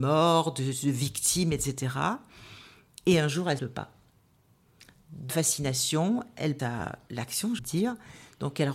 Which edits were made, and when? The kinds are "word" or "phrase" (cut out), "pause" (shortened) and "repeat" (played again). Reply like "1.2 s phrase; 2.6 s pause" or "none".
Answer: 3.6 s word; 5.3 s word; 6.6 s word; 7.6 s word